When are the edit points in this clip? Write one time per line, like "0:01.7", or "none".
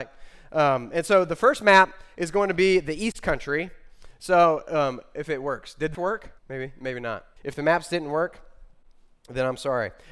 0:05.9
0:06.4
0:07.4